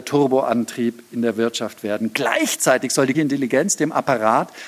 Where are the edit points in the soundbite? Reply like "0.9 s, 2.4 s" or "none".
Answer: 3.1 s